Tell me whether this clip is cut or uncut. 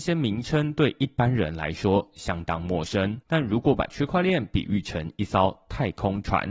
cut